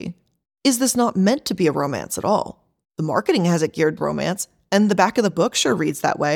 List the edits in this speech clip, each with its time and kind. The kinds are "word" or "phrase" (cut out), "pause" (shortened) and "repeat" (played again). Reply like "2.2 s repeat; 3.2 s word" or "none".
4.0 s word